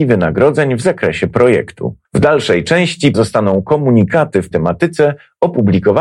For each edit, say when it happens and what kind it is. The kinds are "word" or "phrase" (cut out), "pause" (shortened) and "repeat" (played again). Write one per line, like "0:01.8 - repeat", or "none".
0:02.0 - pause
0:03.1 - word
0:04.5 - word

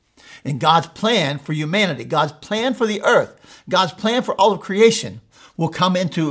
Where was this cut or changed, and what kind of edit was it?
none

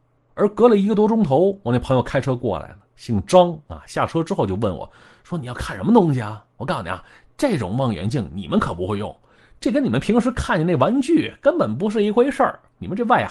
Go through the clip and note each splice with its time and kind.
none

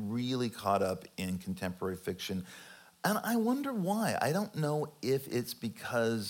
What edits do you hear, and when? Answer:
none

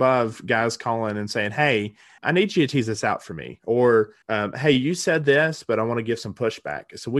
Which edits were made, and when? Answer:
0:02.2 - word
0:04.2 - pause

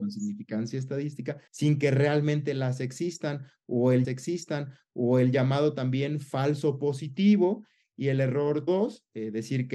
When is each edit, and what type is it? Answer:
0:01.5 - pause
0:04.0 - repeat
0:08.7 - word

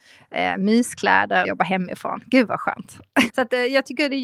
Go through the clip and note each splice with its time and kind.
0:01.4 - phrase
0:03.3 - word

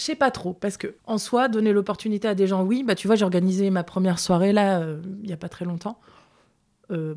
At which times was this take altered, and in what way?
0:01.0 - pause

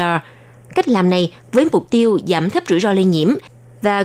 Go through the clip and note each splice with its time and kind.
none

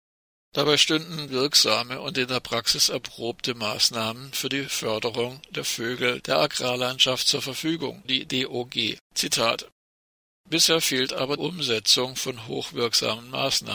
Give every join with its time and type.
0:01.3 - word
0:08.0 - word
0:09.0 - pause
0:11.4 - phrase

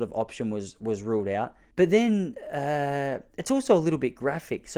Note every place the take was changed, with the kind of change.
0:01.7 - pause

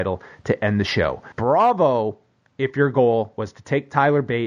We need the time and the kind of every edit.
0:01.3 - pause

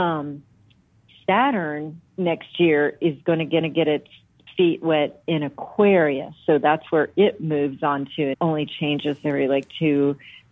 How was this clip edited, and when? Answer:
0:02.1 - pause
0:03.6 - repeat
0:08.3 - word
0:09.2 - word

